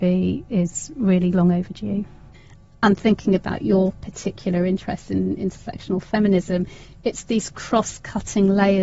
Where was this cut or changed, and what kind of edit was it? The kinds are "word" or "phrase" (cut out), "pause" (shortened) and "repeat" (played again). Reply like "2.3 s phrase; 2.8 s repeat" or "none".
none